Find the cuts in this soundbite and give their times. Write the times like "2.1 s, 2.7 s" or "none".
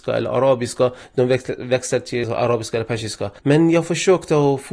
3.4 s